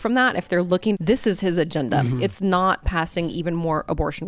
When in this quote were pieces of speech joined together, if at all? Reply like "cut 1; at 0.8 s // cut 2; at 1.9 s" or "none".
cut 1; at 0.9 s

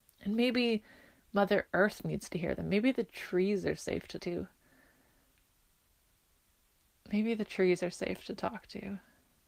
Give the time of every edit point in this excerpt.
cut 1; at 4.2 s

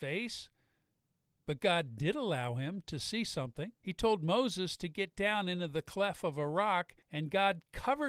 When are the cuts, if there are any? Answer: cut 1; at 3.8 s // cut 2; at 7.0 s

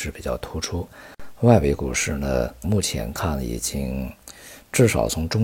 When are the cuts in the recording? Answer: cut 1; at 2.6 s

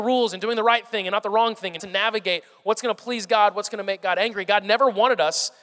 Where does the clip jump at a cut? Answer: cut 1; at 1.8 s

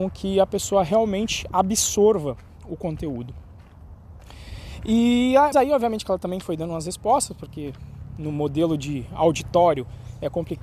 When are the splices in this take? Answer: cut 1; at 5.5 s

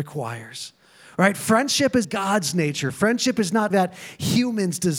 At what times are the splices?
cut 1; at 2.0 s // cut 2; at 3.7 s

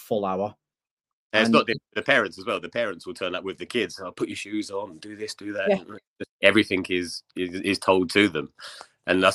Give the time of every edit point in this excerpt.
cut 1; at 6.3 s

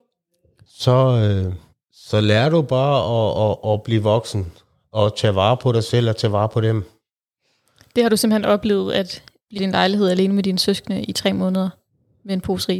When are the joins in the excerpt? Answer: cut 1; at 9.6 s

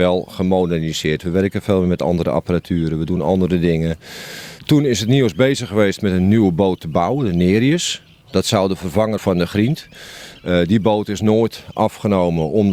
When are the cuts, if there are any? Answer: cut 1; at 8.1 s // cut 2; at 9.2 s

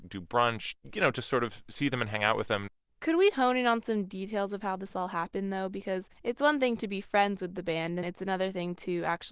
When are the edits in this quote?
cut 1; at 8.0 s

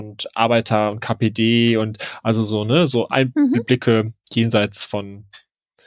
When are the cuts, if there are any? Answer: none

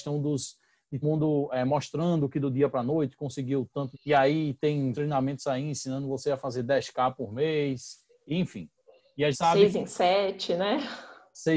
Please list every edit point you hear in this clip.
cut 1; at 1.0 s // cut 2; at 3.9 s // cut 3; at 4.9 s // cut 4; at 9.3 s

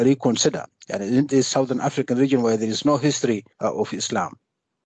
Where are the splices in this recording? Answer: cut 1; at 3.5 s

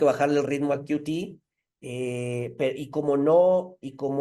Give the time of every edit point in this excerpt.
none

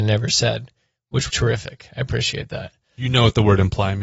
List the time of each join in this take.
cut 1; at 1.3 s

